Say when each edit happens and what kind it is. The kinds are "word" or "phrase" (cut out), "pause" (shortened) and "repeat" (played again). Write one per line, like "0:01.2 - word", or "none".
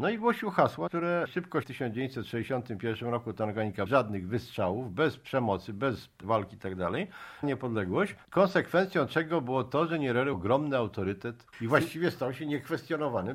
0:01.6 - phrase
0:03.9 - word
0:06.2 - word
0:07.4 - word
0:08.2 - pause
0:10.3 - word
0:11.5 - word